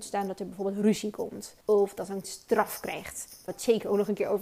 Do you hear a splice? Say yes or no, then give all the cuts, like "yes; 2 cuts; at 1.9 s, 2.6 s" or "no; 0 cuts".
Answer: yes; 3 cuts; at 1.6 s, 2.2 s, 3.5 s